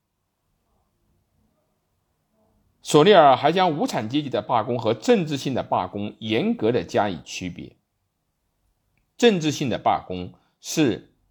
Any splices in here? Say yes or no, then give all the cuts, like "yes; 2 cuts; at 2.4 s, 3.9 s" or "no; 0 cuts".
no; 0 cuts